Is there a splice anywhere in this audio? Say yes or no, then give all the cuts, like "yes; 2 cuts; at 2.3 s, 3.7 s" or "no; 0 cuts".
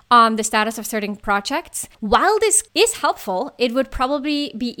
yes; 2 cuts; at 1.9 s, 2.7 s